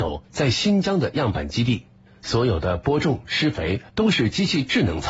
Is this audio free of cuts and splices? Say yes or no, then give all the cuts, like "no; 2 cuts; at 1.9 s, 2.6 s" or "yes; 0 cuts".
yes; 0 cuts